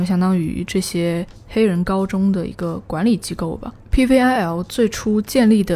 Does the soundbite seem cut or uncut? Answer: uncut